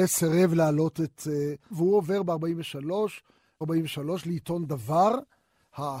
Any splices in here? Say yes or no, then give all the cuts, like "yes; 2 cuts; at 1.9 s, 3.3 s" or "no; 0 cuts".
yes; 2 cuts; at 1.7 s, 3.6 s